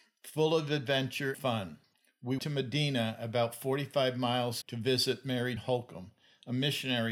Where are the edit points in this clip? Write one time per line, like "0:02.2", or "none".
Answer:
0:01.3
0:02.4
0:04.6
0:05.6